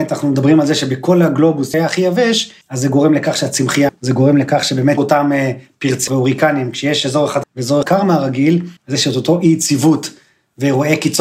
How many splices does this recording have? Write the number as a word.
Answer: eight